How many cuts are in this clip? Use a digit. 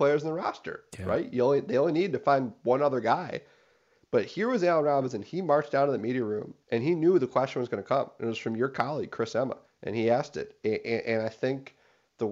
2